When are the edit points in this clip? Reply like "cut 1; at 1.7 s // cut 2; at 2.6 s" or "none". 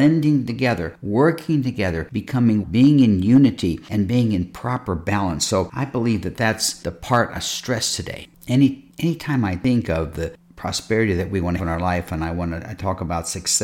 cut 1; at 2.6 s // cut 2; at 7.4 s // cut 3; at 11.6 s